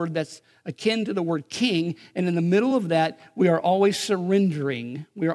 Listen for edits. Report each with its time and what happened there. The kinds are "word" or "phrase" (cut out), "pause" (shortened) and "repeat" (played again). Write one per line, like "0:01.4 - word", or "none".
none